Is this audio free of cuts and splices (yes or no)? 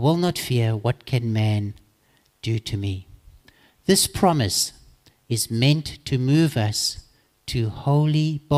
yes